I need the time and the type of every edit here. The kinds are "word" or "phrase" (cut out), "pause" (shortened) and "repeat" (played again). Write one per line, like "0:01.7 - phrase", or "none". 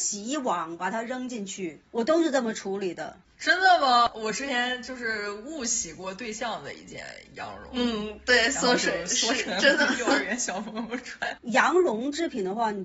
0:01.9 - pause